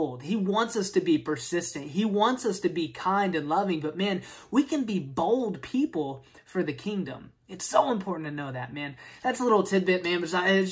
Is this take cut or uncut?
uncut